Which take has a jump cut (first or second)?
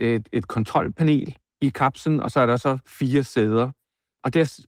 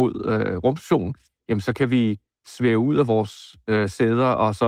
first